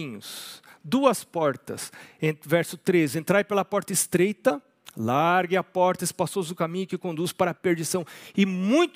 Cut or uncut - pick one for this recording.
uncut